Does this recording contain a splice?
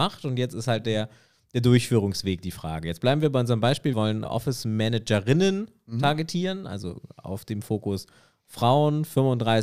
yes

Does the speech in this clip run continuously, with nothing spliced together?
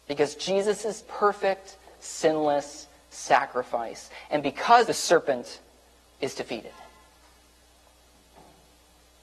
no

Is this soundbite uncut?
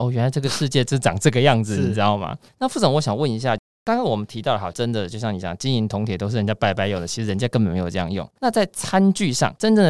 no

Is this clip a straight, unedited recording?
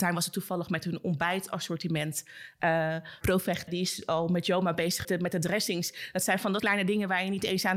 no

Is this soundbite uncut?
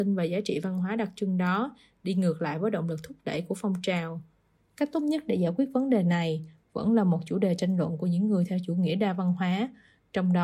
yes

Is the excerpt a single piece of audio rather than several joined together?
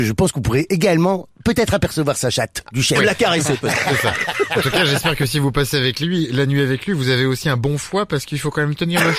no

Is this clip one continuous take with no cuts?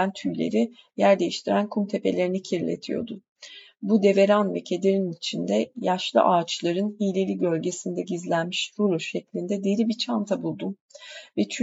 yes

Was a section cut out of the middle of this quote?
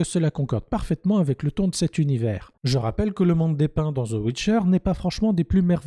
yes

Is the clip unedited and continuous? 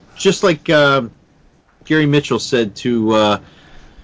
yes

